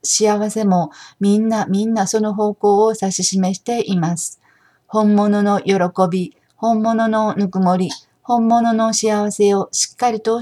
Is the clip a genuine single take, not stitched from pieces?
yes; 0 cuts

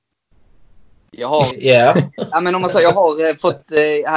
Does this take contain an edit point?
yes; 2 cuts; at 1.5 s, 2.7 s

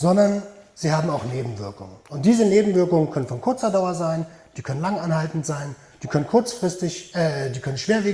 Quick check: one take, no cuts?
yes; 0 cuts

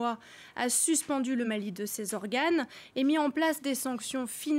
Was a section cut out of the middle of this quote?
no; 0 cuts

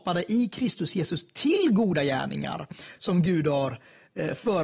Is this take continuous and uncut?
yes; 0 cuts

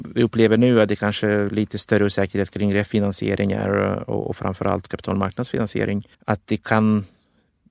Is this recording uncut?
no; 1 cut; at 6.1 s

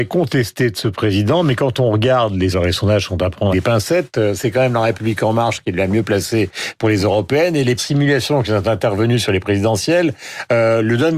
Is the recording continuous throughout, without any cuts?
no; 3 cuts; at 2.5 s, 3.5 s, 7.8 s

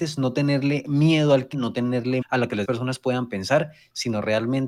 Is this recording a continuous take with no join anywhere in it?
no; 3 cuts; at 1.5 s, 2.2 s, 2.6 s

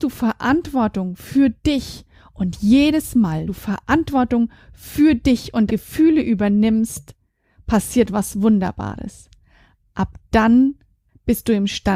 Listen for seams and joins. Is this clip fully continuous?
no; 2 cuts; at 3.5 s, 5.7 s

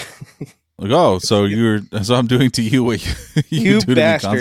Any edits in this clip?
no; 0 cuts

